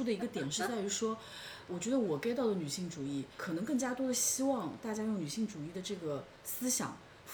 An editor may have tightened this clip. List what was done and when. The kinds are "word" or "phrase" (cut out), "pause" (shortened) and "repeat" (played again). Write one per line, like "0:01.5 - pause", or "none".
0:01.7 - word